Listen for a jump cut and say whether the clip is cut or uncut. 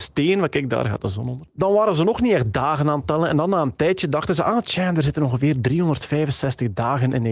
uncut